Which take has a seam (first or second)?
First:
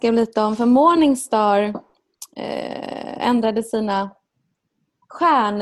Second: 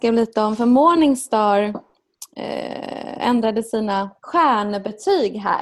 second